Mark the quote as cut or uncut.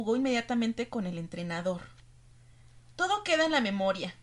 uncut